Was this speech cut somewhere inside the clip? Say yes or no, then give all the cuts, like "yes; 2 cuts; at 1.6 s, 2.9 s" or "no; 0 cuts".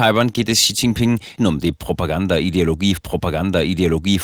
yes; 2 cuts; at 1.4 s, 3.0 s